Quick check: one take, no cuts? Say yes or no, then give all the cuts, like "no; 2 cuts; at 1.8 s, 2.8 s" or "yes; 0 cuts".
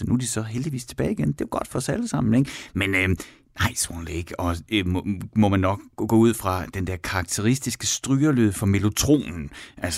yes; 0 cuts